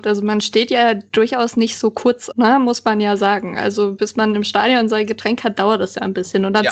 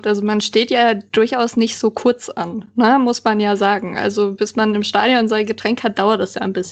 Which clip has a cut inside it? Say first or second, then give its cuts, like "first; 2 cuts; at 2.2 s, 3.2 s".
first; 1 cut; at 2.3 s